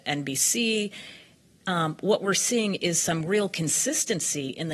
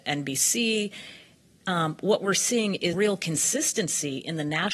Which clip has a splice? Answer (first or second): second